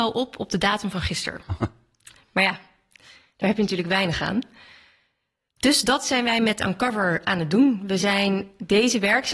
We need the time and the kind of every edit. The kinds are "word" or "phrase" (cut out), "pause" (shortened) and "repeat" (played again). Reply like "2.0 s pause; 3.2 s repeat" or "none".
none